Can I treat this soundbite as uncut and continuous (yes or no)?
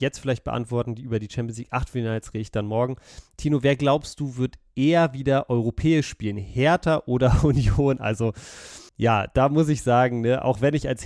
no